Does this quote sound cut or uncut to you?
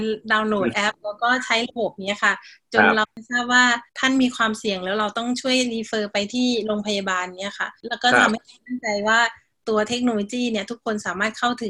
cut